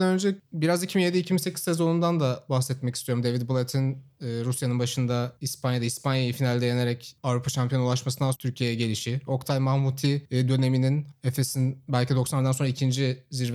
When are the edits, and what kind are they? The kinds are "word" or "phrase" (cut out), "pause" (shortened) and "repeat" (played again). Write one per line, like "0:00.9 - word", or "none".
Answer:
0:08.3 - word